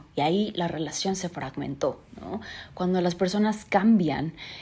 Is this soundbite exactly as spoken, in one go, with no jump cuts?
yes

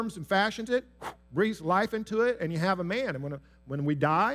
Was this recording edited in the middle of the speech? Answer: no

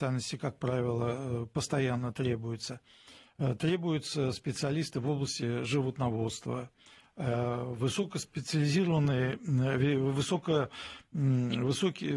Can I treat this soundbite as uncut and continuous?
yes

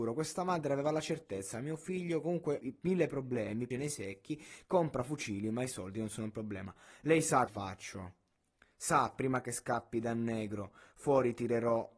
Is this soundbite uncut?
no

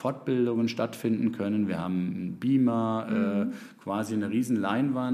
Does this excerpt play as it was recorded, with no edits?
yes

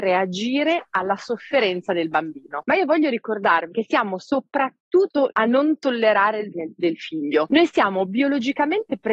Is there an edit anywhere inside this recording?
yes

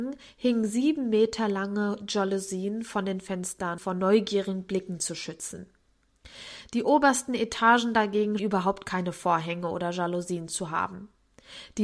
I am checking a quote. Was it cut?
yes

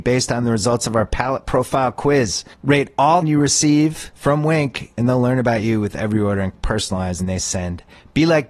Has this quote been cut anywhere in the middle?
yes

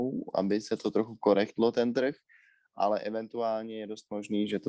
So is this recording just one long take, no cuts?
yes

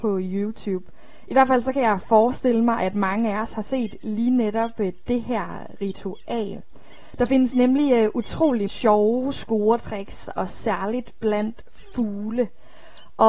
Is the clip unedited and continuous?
no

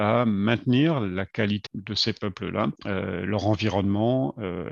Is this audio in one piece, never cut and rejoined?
no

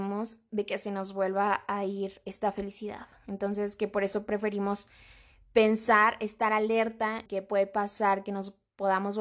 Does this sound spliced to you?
yes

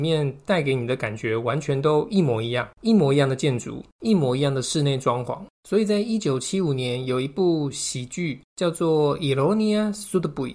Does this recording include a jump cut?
yes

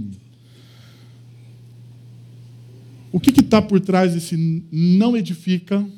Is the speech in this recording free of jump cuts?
yes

